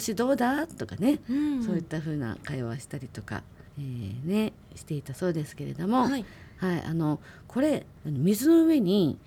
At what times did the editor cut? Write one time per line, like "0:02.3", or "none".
0:03.7